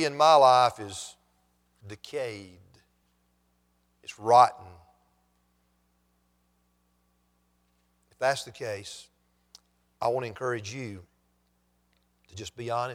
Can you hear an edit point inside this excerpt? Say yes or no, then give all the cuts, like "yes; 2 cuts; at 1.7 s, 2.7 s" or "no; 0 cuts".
no; 0 cuts